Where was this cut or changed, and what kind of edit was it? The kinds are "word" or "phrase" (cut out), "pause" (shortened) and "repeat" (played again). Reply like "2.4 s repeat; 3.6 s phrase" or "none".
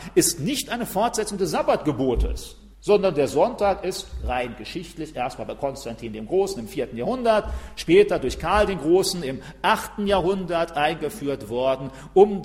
2.7 s pause